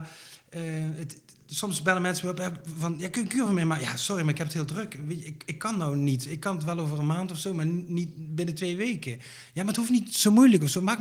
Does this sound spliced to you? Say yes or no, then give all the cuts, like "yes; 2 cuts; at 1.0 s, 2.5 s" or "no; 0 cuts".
no; 0 cuts